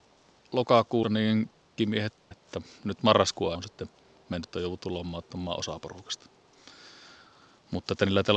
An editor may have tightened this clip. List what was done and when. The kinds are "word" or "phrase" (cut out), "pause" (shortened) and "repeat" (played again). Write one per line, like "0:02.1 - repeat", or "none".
0:01.0 - word
0:01.8 - word
0:02.3 - word
0:03.5 - word
0:04.4 - word